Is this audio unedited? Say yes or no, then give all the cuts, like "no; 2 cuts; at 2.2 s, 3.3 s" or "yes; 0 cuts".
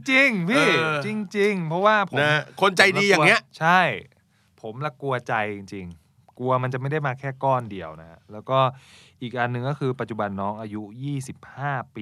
yes; 0 cuts